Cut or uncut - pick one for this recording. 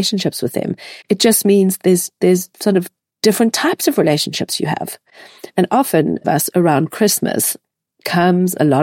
cut